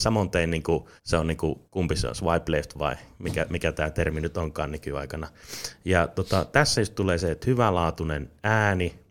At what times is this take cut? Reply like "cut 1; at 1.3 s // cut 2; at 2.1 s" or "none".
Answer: cut 1; at 1.0 s // cut 2; at 1.6 s